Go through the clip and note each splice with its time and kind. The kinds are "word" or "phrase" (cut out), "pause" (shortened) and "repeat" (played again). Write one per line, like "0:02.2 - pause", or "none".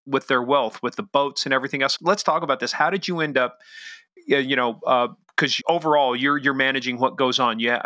0:02.0 - word
0:05.6 - word